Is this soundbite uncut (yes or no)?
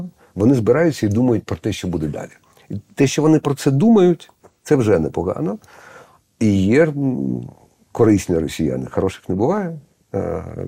yes